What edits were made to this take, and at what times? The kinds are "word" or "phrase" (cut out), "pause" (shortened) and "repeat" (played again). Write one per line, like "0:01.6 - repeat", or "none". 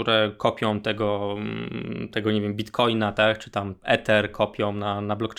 none